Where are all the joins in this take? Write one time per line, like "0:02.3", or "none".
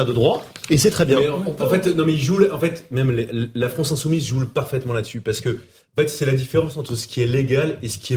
none